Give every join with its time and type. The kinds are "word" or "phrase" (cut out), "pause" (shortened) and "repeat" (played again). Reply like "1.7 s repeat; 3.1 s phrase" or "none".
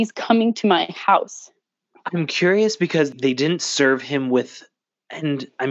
none